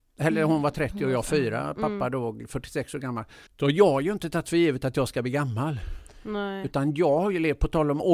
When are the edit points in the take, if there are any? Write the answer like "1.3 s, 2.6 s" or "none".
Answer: 3.5 s